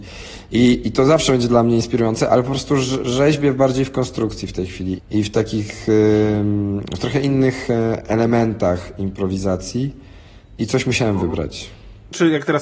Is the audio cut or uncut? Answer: cut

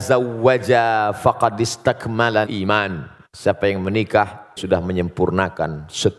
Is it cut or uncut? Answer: cut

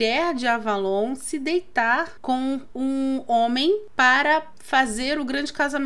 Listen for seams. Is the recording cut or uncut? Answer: uncut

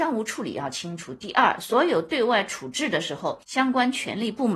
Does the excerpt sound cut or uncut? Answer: cut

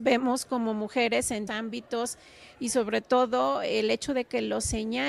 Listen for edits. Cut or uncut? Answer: cut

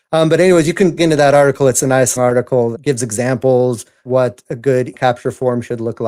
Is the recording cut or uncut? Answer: cut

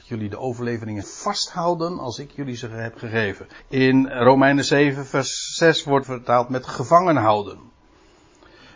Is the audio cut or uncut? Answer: cut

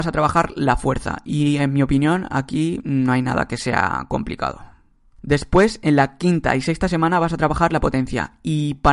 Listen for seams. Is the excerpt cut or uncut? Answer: uncut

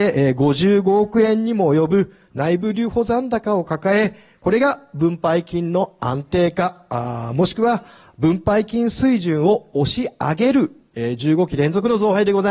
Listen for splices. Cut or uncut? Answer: uncut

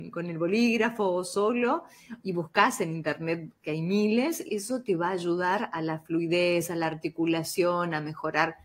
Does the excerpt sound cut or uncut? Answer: cut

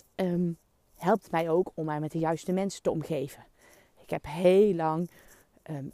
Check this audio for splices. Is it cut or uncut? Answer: uncut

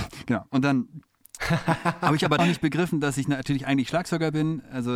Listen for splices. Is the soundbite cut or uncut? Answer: cut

